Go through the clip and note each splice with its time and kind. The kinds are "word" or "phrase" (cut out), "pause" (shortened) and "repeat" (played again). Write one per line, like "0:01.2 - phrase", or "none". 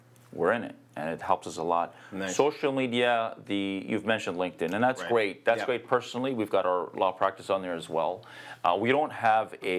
none

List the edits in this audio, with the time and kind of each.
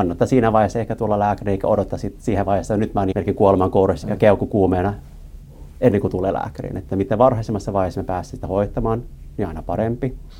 0:03.1 - word
0:04.0 - word

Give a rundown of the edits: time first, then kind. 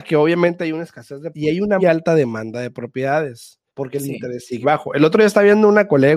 0:01.3 - word
0:01.8 - word
0:03.7 - pause
0:04.6 - word

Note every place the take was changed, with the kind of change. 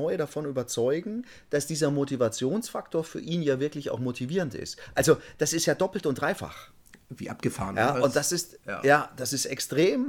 none

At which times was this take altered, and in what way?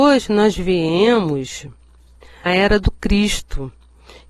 0:02.5 - word

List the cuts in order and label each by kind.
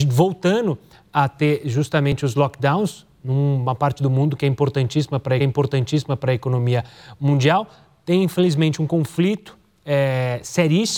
0:05.4 - repeat

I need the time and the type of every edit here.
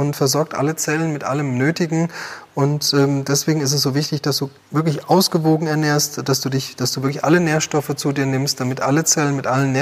0:04.6 - pause

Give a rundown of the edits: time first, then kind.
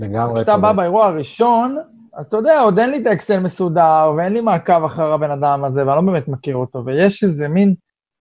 none

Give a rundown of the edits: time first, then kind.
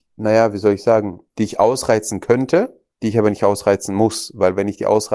0:01.3 - pause
0:02.9 - pause

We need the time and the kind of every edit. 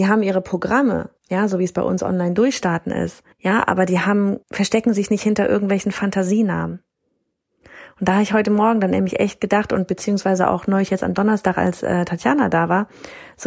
0:01.2 - pause
0:03.3 - pause
0:04.4 - pause

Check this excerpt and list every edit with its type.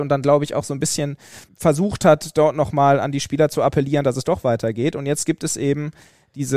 0:01.5 - word

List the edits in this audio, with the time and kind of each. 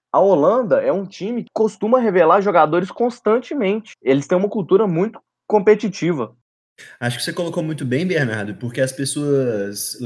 none

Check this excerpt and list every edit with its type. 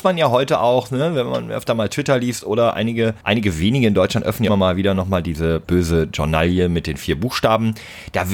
0:03.2 - pause
0:04.5 - phrase
0:05.6 - word

